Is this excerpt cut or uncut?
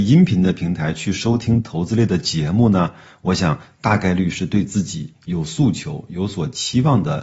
uncut